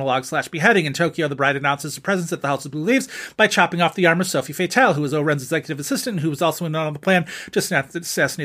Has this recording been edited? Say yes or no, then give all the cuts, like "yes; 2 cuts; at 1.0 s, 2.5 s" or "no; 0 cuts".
no; 0 cuts